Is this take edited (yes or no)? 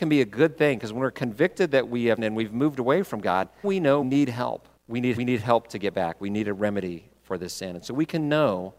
yes